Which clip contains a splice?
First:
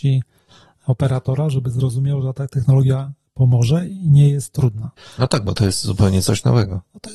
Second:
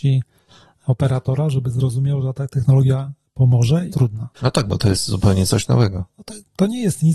second; 2 cuts; at 3.9 s, 4.4 s

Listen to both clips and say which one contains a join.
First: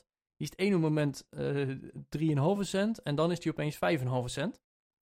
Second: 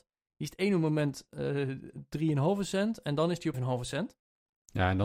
second; 1 cut; at 3.5 s

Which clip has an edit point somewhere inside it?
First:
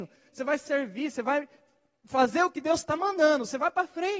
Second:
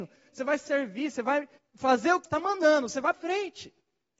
second; 3 cuts; at 1.6 s, 2.2 s, 3.1 s

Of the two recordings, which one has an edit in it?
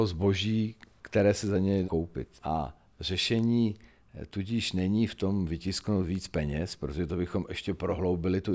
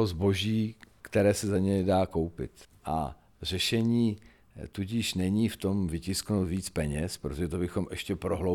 first; 2 cuts; at 1.8 s, 2.4 s

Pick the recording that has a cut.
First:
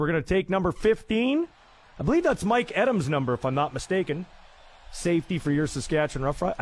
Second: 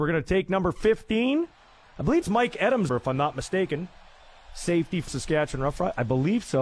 second; 3 cuts; at 2.2 s, 2.9 s, 5.1 s

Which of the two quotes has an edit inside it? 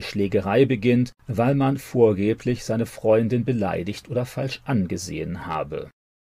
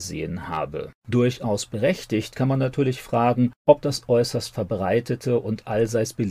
second; 1 cut; at 1.0 s

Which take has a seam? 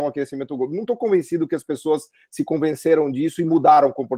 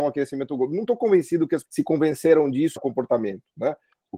second; 2 cuts; at 1.7 s, 2.8 s

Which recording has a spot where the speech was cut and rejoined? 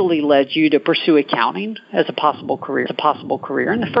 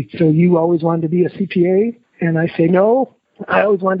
first; 1 cut; at 2.9 s

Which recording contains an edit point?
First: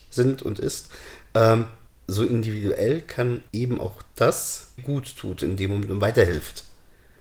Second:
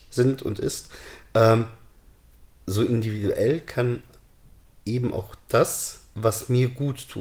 first; 3 cuts; at 1.9 s, 3.5 s, 4.8 s

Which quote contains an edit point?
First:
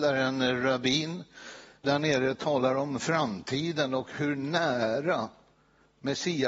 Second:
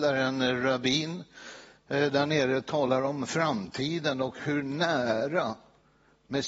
first; 1 cut; at 1.8 s

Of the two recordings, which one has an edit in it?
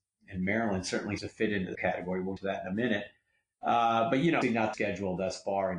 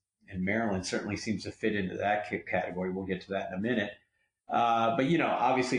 first; 5 cuts; at 1.2 s, 1.7 s, 2.4 s, 4.4 s, 4.7 s

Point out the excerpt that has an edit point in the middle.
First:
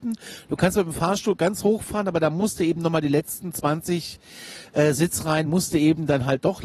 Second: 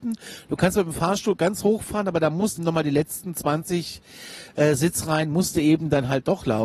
second; 1 cut; at 2.6 s

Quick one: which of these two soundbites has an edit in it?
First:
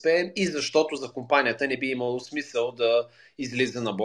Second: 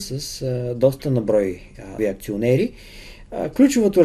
second; 1 cut; at 2.0 s

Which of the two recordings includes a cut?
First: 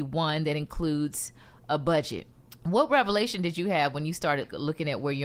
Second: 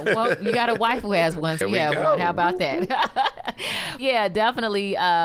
second; 2 cuts; at 1.6 s, 4.0 s

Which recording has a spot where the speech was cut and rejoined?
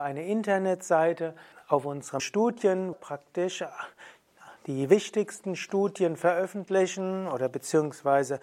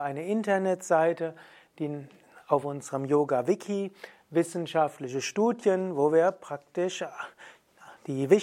first; 3 cuts; at 1.5 s, 2.2 s, 2.9 s

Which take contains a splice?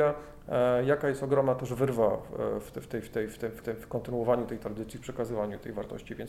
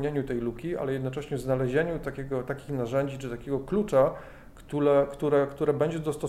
first; 1 cut; at 3.6 s

